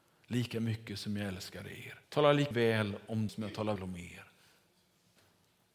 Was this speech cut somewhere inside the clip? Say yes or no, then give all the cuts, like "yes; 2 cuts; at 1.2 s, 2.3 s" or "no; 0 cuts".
yes; 4 cuts; at 2.0 s, 2.5 s, 3.3 s, 3.8 s